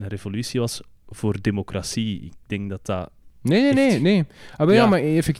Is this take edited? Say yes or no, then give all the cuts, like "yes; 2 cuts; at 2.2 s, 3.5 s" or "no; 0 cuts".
no; 0 cuts